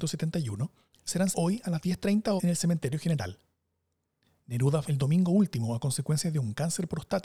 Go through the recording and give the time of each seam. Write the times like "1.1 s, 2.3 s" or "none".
1.3 s, 2.4 s, 4.8 s